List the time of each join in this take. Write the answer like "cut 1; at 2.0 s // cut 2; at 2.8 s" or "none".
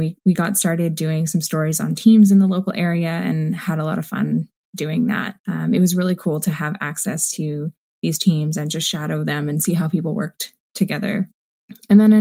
cut 1; at 5.4 s

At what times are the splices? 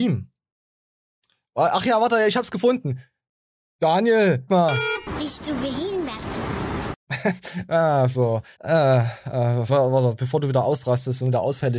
cut 1; at 4.5 s // cut 2; at 8.5 s // cut 3; at 9.7 s

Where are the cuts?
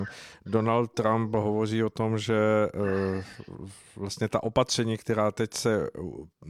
none

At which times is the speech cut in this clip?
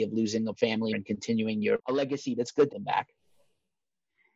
cut 1; at 0.9 s // cut 2; at 1.8 s // cut 3; at 2.4 s // cut 4; at 2.7 s

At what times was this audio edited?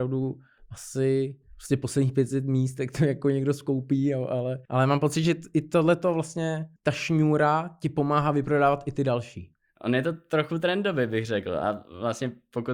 cut 1; at 4.6 s // cut 2; at 6.8 s

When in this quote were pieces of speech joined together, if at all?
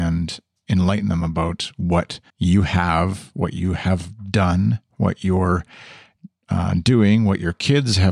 cut 1; at 2.3 s

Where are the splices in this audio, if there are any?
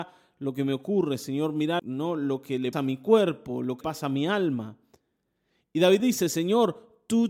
cut 1; at 1.8 s // cut 2; at 2.7 s // cut 3; at 3.8 s // cut 4; at 6.0 s

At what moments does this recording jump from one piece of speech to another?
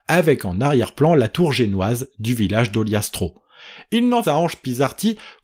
cut 1; at 4.2 s

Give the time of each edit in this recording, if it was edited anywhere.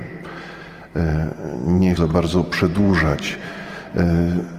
cut 1; at 2.0 s

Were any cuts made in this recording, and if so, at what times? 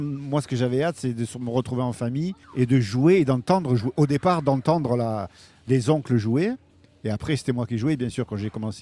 cut 1; at 2.4 s

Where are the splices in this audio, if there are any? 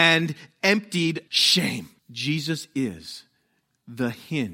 cut 1; at 1.3 s // cut 2; at 2.0 s

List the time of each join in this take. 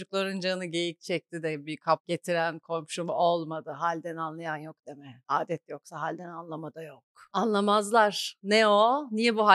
none

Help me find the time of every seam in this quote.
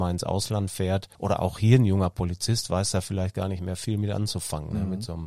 cut 1; at 1.1 s

